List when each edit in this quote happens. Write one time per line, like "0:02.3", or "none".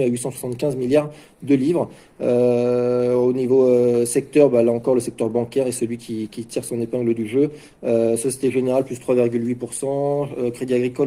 none